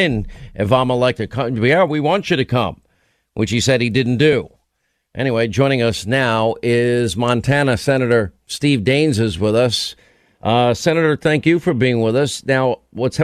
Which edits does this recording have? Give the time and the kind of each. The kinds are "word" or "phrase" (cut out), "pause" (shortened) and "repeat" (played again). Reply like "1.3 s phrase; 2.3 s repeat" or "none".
none

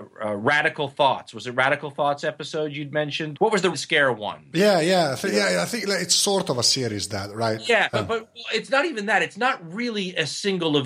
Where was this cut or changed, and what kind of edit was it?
3.4 s word; 3.7 s word; 7.9 s word

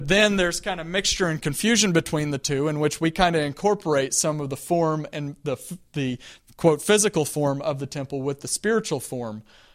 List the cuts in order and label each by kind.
none

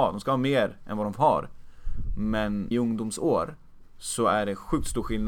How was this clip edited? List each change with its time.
2.7 s word

